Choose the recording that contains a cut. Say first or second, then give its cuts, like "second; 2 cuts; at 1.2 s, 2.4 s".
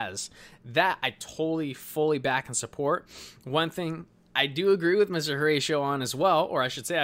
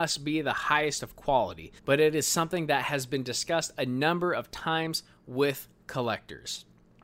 second; 1 cut; at 1.8 s